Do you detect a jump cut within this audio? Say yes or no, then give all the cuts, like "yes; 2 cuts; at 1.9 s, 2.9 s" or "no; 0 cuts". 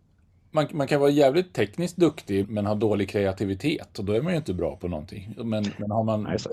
yes; 1 cut; at 2.4 s